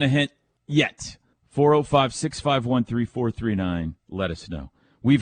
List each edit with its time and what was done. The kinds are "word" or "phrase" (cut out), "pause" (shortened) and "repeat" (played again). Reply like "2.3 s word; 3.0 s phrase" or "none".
1.3 s pause; 4.0 s pause